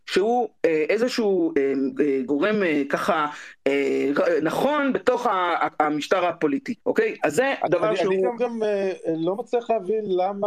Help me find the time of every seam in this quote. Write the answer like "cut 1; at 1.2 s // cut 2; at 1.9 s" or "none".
cut 1; at 6.8 s // cut 2; at 8.4 s